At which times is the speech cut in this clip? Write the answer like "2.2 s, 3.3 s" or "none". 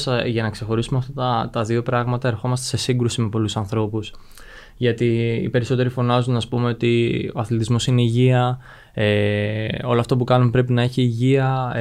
none